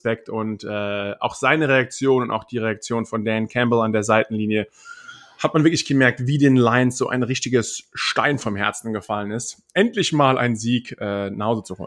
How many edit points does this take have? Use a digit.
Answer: 0